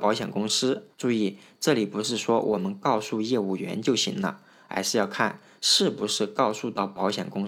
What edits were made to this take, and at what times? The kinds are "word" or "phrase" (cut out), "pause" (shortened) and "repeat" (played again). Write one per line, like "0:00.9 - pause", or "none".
0:00.9 - pause